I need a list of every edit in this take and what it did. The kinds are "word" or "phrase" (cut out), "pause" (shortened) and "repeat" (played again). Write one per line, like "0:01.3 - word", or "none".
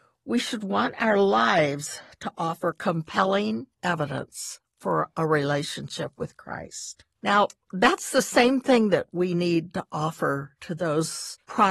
0:03.7 - pause
0:07.1 - pause